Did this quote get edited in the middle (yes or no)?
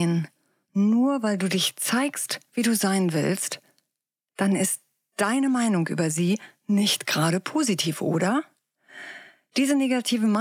no